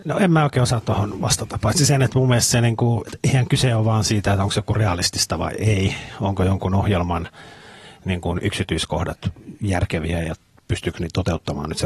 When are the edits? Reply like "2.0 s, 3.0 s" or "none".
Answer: none